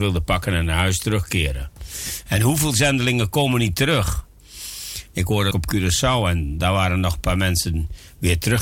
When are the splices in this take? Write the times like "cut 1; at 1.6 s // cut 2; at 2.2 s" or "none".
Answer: cut 1; at 5.5 s